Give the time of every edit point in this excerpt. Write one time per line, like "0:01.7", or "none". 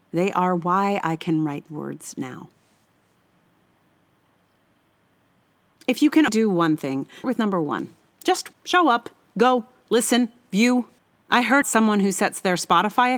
0:01.7
0:06.3
0:07.2
0:08.5
0:11.0
0:11.6